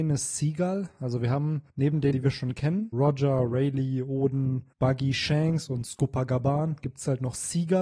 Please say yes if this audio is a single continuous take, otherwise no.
no